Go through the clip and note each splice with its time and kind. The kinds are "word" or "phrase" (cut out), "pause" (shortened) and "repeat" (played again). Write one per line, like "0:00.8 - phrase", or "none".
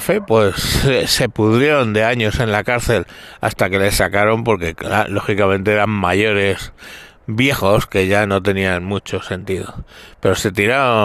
none